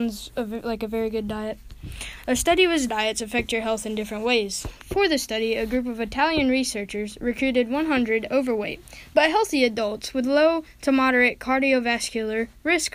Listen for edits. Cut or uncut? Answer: cut